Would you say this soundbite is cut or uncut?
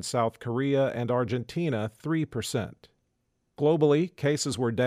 uncut